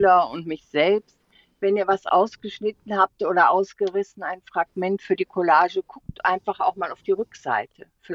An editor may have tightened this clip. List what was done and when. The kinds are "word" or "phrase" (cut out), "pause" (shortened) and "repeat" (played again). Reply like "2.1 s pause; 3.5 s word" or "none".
none

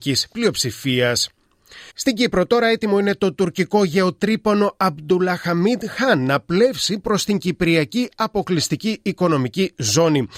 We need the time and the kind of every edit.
1.9 s pause

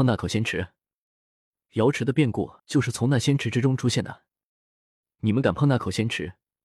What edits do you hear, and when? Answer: 2.6 s pause

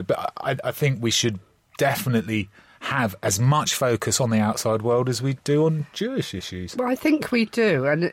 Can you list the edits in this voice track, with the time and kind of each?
none

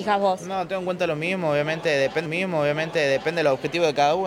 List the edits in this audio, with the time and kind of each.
2.3 s repeat

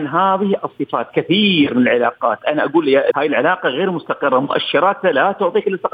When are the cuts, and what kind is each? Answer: 3.1 s word

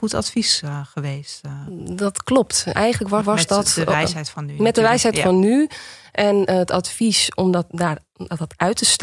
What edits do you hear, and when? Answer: 2.7 s word; 3.2 s repeat

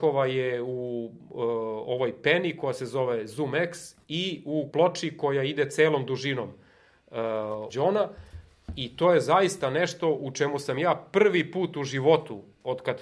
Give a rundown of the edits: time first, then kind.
4.7 s word; 7.7 s word

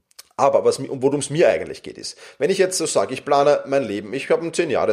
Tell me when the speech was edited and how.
none

